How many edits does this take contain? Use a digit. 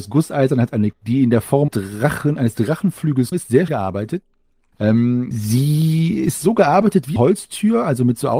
6